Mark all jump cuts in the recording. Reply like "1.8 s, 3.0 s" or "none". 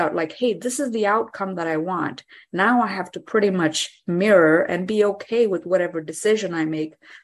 none